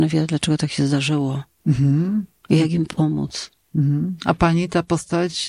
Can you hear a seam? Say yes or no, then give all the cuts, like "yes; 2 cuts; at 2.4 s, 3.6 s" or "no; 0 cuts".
no; 0 cuts